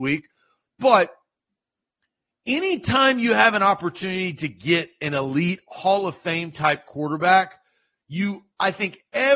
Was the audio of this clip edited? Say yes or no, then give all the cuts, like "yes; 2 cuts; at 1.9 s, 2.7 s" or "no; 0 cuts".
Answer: no; 0 cuts